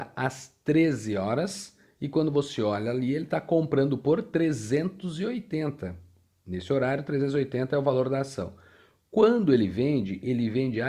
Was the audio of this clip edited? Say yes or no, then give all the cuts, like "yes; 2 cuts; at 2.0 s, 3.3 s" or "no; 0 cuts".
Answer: no; 0 cuts